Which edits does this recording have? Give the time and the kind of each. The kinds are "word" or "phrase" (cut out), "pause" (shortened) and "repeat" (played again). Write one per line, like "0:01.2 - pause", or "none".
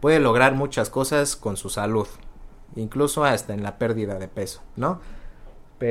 none